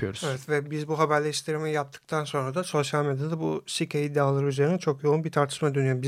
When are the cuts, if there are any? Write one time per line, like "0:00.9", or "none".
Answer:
none